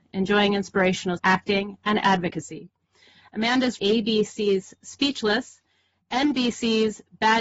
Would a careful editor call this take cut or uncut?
cut